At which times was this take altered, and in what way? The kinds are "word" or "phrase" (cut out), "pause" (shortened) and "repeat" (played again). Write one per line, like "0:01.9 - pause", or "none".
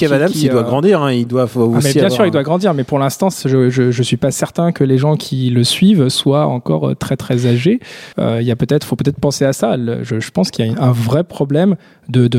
0:08.1 - pause